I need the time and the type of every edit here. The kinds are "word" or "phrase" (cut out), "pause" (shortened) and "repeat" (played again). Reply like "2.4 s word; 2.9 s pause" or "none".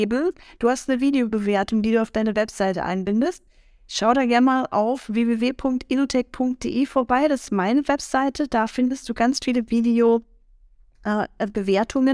none